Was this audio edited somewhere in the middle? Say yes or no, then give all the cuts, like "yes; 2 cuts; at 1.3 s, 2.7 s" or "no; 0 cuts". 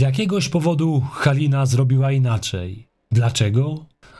no; 0 cuts